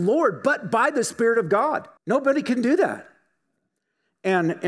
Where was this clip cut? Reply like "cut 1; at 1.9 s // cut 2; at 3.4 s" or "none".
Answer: cut 1; at 2.0 s